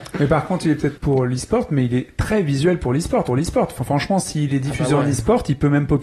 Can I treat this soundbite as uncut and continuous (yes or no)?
no